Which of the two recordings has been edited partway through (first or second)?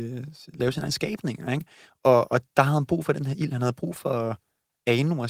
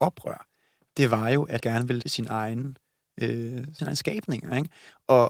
second